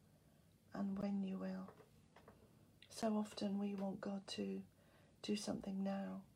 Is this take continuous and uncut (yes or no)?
yes